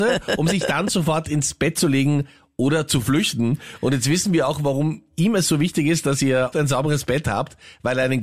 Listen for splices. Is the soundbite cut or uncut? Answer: cut